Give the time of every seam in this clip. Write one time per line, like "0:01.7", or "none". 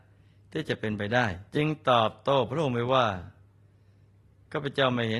0:01.5